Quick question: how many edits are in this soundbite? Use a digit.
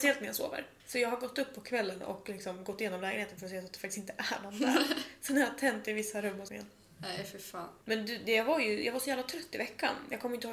2